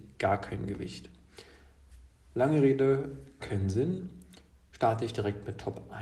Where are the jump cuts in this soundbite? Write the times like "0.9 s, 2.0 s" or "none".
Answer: 3.4 s